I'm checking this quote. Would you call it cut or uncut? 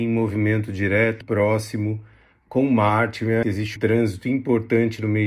cut